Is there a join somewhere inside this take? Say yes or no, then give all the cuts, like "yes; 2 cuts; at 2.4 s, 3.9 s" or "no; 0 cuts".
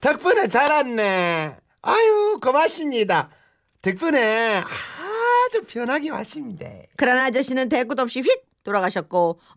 no; 0 cuts